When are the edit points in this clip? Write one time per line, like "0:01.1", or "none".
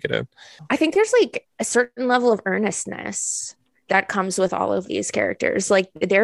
none